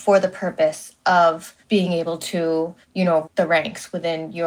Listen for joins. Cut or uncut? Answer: cut